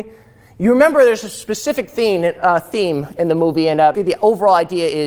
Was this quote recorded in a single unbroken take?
no; 1 cut; at 3.9 s

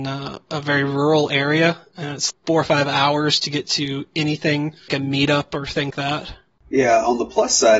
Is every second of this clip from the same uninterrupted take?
no; 3 cuts; at 2.3 s, 4.9 s, 5.9 s

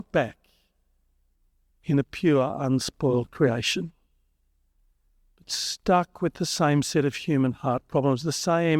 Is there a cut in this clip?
no; 0 cuts

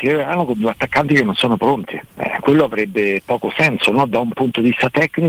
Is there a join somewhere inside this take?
yes; 1 cut; at 2.1 s

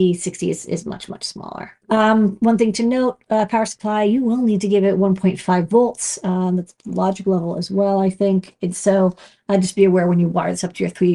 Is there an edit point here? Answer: yes; 1 cut; at 1.8 s

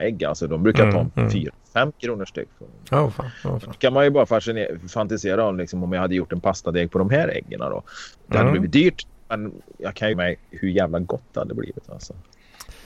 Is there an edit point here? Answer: yes; 2 cuts; at 8.1 s, 10.1 s

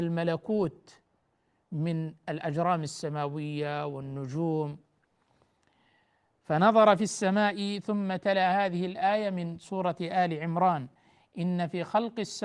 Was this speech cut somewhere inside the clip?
no; 0 cuts

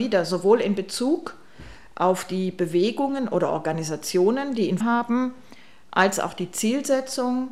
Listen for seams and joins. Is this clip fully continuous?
no; 1 cut; at 4.8 s

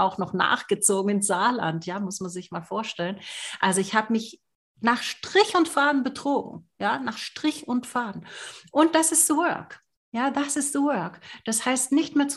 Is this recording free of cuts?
yes; 0 cuts

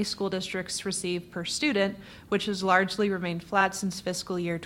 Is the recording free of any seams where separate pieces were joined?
yes; 0 cuts

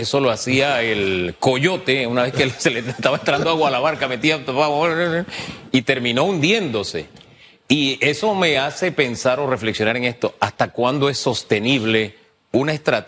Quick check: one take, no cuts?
yes; 0 cuts

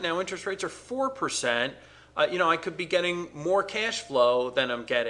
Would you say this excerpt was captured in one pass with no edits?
yes; 0 cuts

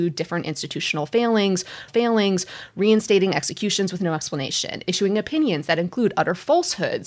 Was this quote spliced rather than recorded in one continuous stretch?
yes; 1 cut; at 1.9 s

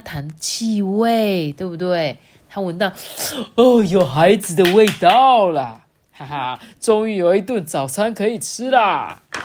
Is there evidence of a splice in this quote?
no; 0 cuts

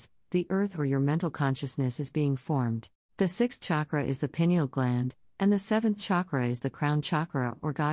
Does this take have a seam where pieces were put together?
yes; 1 cut; at 3.0 s

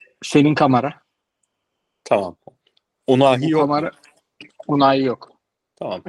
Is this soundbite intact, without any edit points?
yes; 0 cuts

